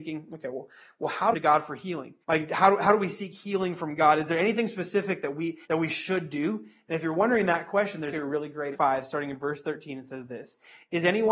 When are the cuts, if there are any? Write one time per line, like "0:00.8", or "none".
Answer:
0:01.3
0:02.2
0:05.6
0:08.1
0:08.7